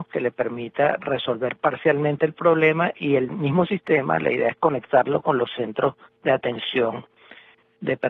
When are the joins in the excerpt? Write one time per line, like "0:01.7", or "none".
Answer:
none

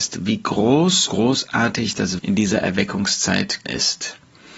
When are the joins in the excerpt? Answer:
0:01.1
0:02.2
0:03.6

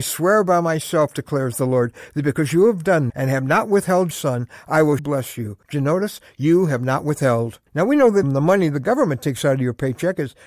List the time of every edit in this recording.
0:03.1
0:04.1
0:05.0
0:05.6
0:07.7
0:08.2

